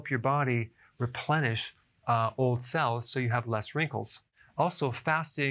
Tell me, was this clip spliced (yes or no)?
no